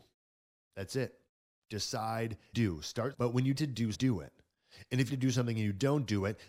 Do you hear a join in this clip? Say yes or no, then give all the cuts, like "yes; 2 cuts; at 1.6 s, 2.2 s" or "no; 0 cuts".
yes; 5 cuts; at 2.5 s, 3.1 s, 3.6 s, 3.9 s, 5.1 s